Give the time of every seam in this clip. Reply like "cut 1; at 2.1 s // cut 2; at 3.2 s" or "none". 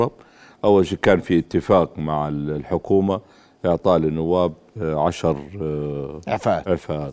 none